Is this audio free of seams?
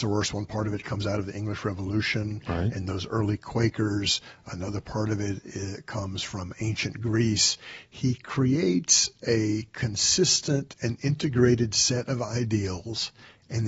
yes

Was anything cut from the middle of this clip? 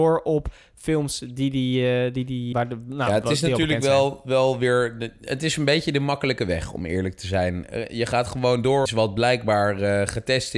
yes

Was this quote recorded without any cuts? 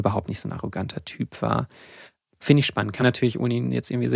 no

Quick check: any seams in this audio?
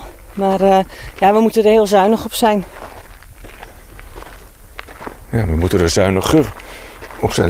no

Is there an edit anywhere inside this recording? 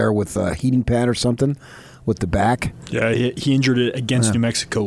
no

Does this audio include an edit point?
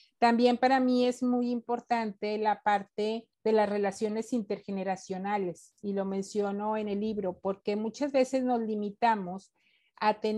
yes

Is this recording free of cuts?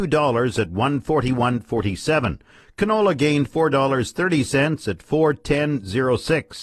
yes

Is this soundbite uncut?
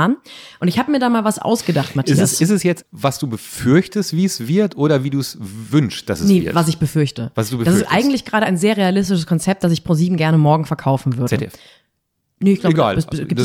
yes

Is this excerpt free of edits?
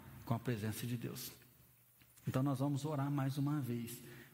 yes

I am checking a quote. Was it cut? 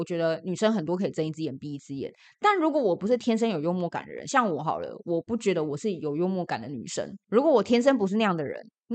no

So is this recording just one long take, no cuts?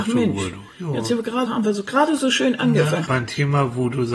no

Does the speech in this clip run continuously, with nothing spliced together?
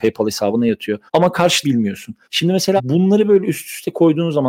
no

